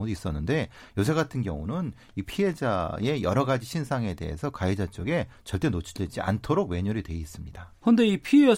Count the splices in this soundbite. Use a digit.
0